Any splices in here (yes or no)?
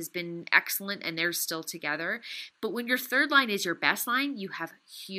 no